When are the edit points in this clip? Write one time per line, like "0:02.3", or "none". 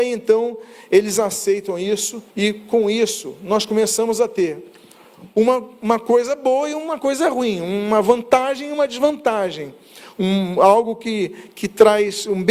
0:02.3